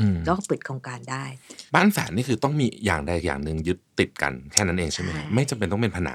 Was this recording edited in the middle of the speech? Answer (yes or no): yes